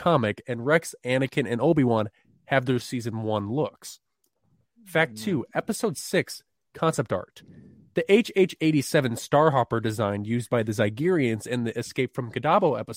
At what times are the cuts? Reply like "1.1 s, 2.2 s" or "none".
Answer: none